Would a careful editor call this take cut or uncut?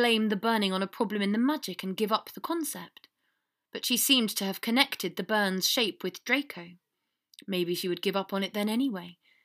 uncut